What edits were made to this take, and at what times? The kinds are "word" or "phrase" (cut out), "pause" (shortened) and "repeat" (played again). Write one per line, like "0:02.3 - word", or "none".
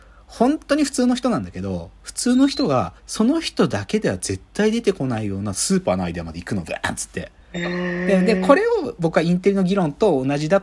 0:03.0 - pause
0:07.4 - pause